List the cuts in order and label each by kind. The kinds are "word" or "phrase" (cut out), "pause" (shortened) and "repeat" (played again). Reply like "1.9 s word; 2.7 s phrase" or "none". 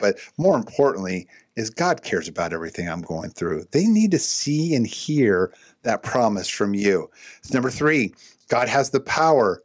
none